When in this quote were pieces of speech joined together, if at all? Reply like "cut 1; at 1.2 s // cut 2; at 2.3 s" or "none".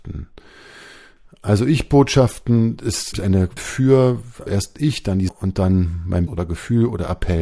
cut 1; at 3.1 s // cut 2; at 3.6 s // cut 3; at 4.5 s // cut 4; at 5.3 s // cut 5; at 6.3 s